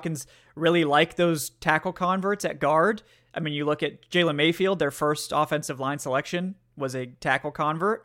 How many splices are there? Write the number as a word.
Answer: zero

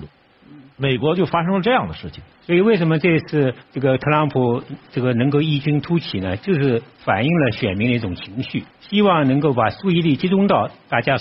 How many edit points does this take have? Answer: three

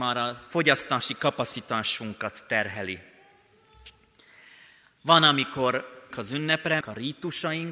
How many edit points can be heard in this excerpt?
two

